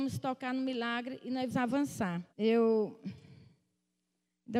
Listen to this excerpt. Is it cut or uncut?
cut